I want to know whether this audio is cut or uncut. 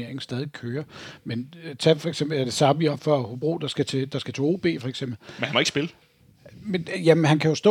uncut